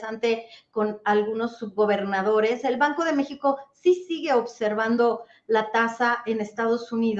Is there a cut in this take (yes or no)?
no